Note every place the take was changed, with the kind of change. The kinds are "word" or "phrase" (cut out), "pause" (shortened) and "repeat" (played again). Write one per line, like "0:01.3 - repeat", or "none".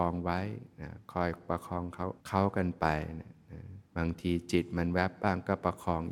0:01.0 - pause
0:02.2 - pause
0:03.9 - pause